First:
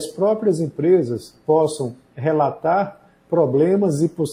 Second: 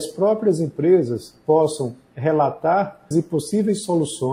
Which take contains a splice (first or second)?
second